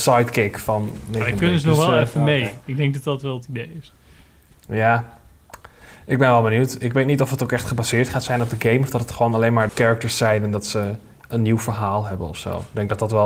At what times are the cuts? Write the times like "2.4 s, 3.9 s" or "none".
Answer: 9.7 s